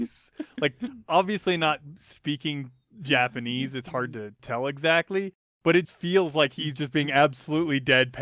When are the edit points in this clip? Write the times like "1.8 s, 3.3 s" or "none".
5.8 s